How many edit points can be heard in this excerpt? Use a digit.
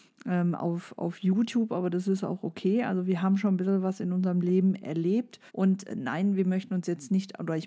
1